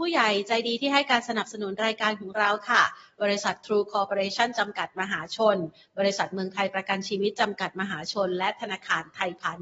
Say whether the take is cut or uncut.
uncut